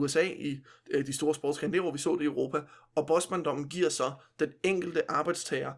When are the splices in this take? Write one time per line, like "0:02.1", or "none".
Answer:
none